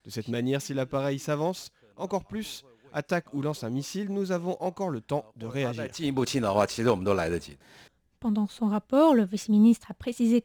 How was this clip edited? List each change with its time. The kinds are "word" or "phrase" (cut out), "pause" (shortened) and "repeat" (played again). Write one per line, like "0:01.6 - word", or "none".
none